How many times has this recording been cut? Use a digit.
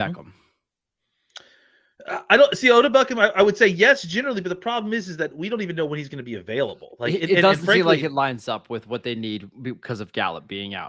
0